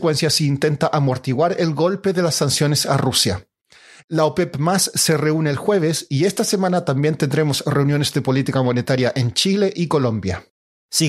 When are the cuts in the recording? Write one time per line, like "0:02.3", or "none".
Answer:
none